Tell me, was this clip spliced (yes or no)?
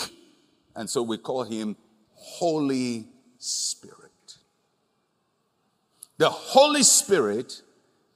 no